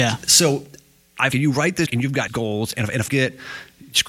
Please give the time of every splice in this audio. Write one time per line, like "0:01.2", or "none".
0:01.3
0:01.9
0:02.3
0:02.7
0:03.1